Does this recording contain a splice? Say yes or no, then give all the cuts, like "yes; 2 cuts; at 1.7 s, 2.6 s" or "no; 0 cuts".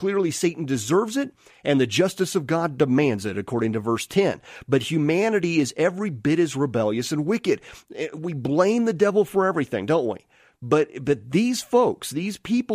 no; 0 cuts